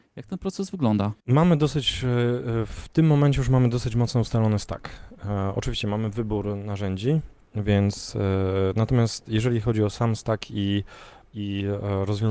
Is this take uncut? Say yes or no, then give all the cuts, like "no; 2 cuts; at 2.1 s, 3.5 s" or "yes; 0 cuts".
no; 1 cut; at 1.2 s